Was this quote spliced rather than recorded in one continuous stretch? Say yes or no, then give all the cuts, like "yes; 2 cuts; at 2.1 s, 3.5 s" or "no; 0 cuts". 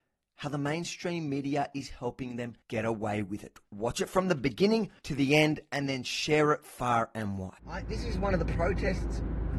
yes; 3 cuts; at 2.6 s, 5.0 s, 7.6 s